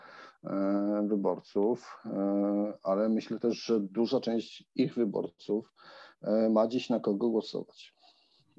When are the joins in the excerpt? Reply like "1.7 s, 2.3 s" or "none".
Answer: none